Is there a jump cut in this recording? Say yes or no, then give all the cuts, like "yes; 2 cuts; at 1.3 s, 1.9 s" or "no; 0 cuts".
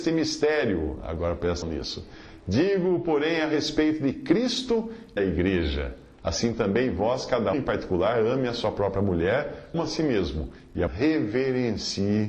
yes; 5 cuts; at 1.6 s, 5.2 s, 7.5 s, 9.7 s, 10.9 s